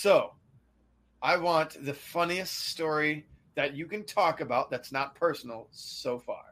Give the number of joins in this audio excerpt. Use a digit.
0